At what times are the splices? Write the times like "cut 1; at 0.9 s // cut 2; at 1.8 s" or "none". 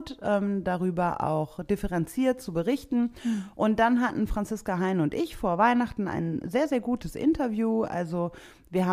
none